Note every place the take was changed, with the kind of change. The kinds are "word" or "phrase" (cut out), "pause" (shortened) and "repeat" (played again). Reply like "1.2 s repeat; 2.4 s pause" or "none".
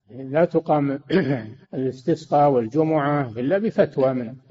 1.6 s pause